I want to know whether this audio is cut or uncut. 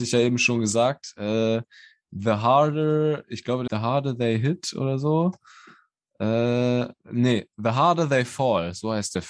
cut